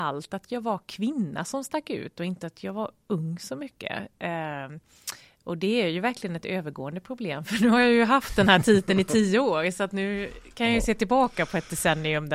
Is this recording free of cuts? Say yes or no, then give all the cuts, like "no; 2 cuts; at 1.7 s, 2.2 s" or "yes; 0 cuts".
yes; 0 cuts